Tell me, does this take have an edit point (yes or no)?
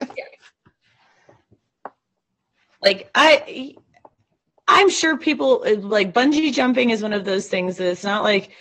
no